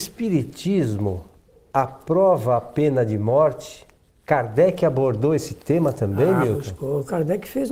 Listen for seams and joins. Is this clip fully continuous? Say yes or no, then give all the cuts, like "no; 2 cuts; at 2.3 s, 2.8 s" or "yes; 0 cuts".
yes; 0 cuts